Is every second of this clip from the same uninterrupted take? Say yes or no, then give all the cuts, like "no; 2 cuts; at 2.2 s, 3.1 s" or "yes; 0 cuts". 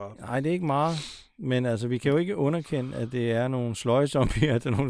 yes; 0 cuts